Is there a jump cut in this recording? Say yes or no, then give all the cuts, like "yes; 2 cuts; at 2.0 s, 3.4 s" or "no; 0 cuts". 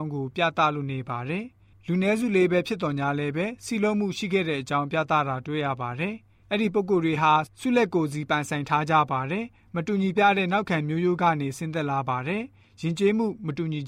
yes; 1 cut; at 10.1 s